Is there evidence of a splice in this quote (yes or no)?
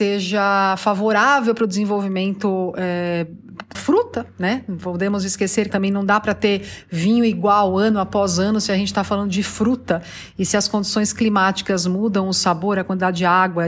yes